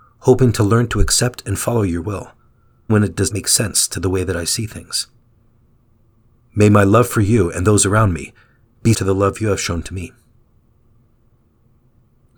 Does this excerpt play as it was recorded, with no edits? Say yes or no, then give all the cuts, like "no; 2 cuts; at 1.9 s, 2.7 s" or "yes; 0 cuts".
no; 3 cuts; at 2.9 s, 3.3 s, 8.9 s